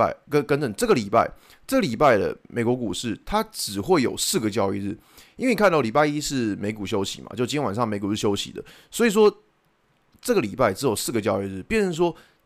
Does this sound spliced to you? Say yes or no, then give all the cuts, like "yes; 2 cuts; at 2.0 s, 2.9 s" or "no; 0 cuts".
no; 0 cuts